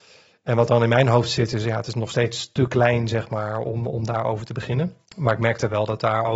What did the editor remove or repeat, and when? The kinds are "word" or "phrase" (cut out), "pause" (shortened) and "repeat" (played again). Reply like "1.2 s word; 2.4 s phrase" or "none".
5.0 s pause

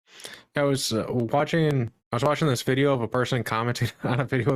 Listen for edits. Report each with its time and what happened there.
2.0 s pause

